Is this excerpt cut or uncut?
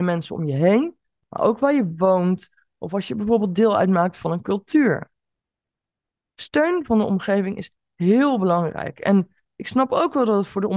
uncut